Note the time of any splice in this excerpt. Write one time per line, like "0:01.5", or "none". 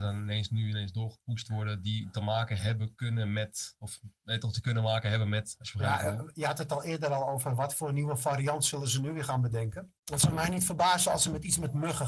0:10.0